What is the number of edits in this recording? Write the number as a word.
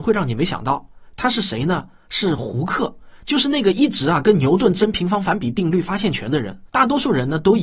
one